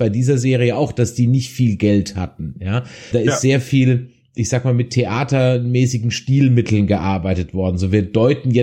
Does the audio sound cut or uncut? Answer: cut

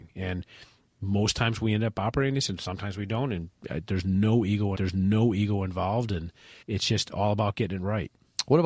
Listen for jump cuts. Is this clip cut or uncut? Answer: cut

